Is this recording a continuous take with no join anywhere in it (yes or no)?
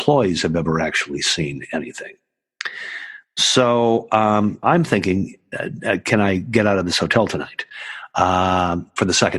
no